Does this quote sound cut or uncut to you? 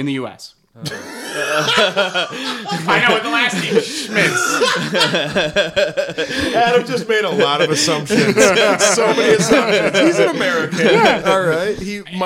uncut